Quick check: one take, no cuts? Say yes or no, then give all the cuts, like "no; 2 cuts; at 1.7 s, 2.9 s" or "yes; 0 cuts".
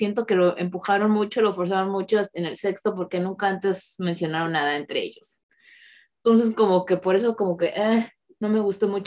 yes; 0 cuts